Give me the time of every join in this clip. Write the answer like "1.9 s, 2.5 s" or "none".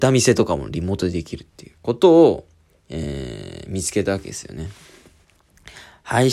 1.8 s